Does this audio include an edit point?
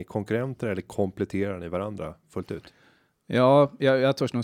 no; 0 cuts

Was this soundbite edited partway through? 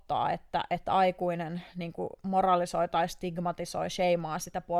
no; 0 cuts

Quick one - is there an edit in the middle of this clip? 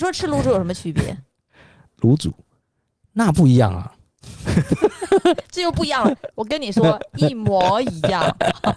no; 0 cuts

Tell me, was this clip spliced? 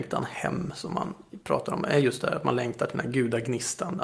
no; 0 cuts

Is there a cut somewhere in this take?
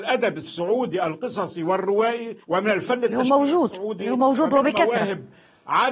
yes; 1 cut; at 2.4 s

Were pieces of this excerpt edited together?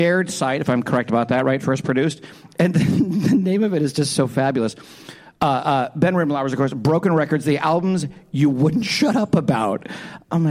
no; 0 cuts

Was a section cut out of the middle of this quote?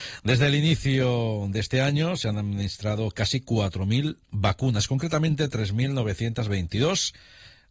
no; 0 cuts

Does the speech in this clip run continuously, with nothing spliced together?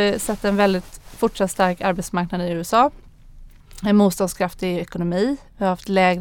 yes; 0 cuts

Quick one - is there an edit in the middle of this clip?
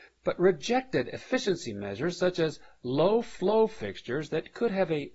no; 0 cuts

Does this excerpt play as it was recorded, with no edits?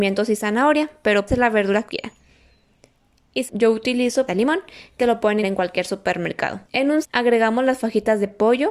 no; 8 cuts; at 1.3 s, 1.9 s, 3.5 s, 4.3 s, 5.0 s, 5.4 s, 6.6 s, 7.0 s

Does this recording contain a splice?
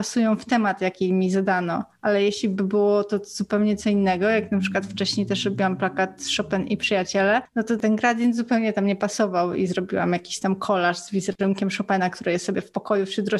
no; 0 cuts

